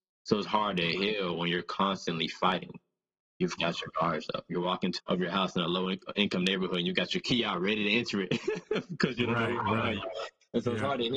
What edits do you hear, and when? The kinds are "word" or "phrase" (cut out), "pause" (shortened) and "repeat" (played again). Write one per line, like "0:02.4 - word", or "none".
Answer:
0:03.6 - word
0:05.0 - phrase